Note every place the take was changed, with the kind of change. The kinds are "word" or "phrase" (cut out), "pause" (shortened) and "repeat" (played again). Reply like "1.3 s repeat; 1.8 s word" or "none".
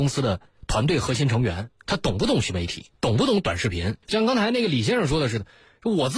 4.0 s pause